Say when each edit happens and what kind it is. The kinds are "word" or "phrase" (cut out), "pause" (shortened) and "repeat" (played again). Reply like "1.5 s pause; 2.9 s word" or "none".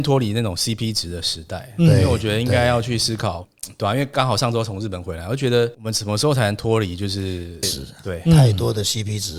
7.6 s word